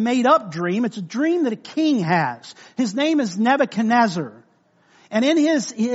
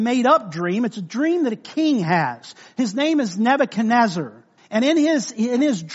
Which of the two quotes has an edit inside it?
second; 1 cut; at 4.6 s

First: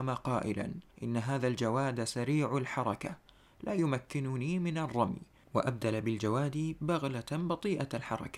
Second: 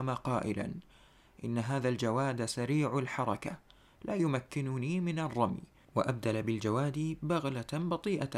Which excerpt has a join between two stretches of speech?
first; 1 cut; at 0.9 s

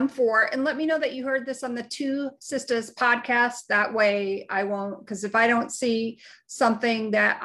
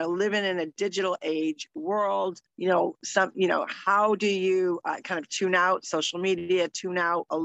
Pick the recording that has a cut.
second; 1 cut; at 2.5 s

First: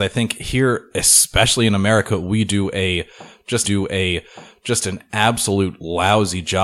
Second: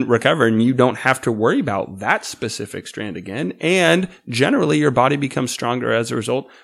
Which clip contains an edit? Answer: first; 1 cut; at 3.6 s

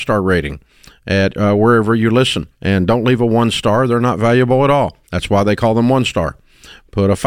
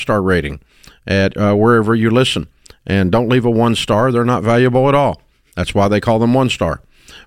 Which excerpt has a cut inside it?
first; 2 cuts; at 2.5 s, 5.0 s

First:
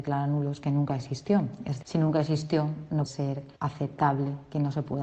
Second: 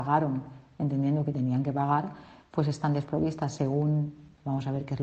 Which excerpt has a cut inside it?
first; 3 cuts; at 1.8 s, 3.1 s, 3.6 s

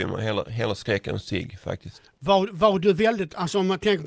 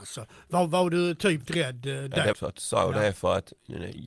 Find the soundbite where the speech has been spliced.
second; 2 cuts; at 1.5 s, 2.3 s

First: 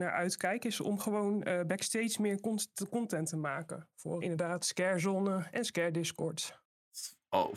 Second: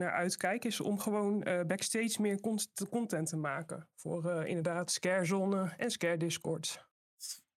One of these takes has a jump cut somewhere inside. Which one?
first; 1 cut; at 4.2 s

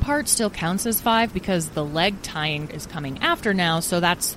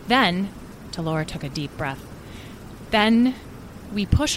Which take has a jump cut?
first; 1 cut; at 2.7 s

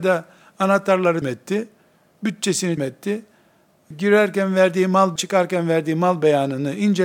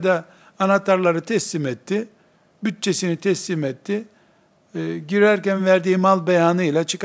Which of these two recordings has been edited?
first; 4 cuts; at 1.2 s, 2.8 s, 3.9 s, 5.2 s

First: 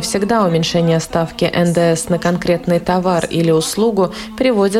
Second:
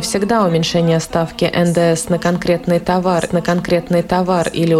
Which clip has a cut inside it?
second; 1 cut; at 3.3 s

